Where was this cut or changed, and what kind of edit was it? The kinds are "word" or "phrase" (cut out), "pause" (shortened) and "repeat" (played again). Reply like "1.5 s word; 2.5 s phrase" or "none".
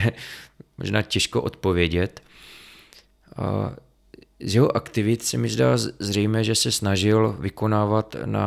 none